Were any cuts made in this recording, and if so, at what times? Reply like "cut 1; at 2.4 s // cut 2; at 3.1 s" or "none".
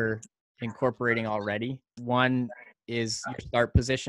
cut 1; at 2.0 s